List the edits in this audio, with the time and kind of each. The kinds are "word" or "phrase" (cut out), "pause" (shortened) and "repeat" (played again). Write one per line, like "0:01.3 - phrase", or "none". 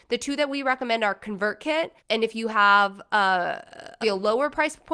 0:02.0 - pause
0:04.0 - word